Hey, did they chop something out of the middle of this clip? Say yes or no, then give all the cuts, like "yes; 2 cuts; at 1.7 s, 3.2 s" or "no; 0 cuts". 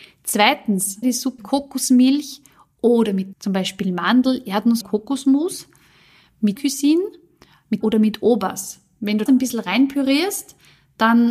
yes; 7 cuts; at 1.0 s, 1.4 s, 3.3 s, 4.8 s, 6.6 s, 7.8 s, 9.3 s